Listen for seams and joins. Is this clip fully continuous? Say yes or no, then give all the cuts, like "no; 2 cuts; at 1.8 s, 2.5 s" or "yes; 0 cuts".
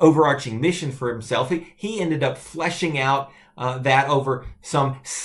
yes; 0 cuts